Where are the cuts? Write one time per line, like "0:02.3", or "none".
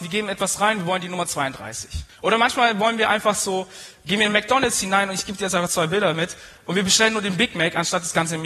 0:02.1